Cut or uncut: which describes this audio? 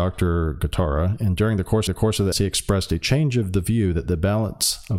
cut